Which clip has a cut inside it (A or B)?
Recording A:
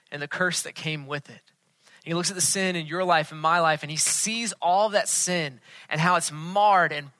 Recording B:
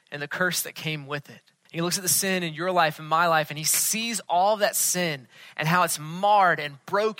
B